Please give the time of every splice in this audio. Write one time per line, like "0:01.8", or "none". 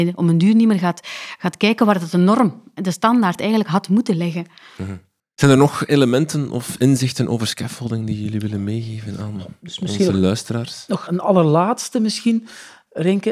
0:11.1